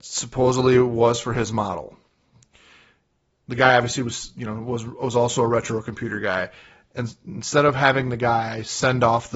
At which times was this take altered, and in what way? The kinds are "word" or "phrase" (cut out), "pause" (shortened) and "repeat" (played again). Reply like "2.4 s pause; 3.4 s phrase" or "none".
none